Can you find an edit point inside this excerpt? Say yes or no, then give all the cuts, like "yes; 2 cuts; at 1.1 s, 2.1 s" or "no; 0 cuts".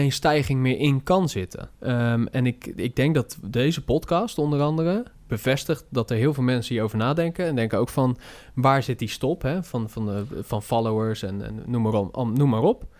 yes; 1 cut; at 1.7 s